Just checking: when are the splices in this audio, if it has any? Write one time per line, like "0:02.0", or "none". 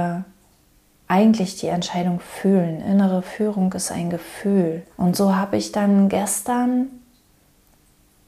0:04.9